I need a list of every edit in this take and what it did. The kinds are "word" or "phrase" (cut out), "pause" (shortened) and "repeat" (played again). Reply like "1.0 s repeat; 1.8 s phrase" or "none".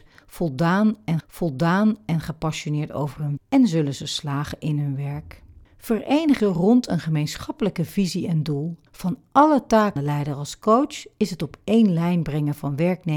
1.2 s repeat; 3.4 s word; 6.4 s word; 8.9 s pause; 10.0 s word